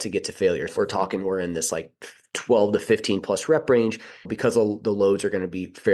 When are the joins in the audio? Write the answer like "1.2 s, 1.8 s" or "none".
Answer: none